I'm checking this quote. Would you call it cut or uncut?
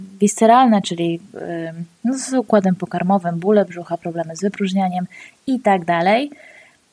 uncut